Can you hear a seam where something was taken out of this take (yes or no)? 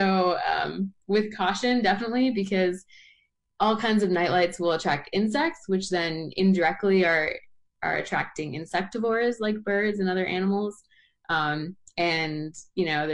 no